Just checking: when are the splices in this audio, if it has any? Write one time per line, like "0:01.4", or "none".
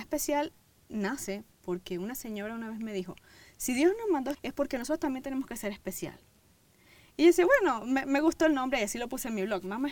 0:04.3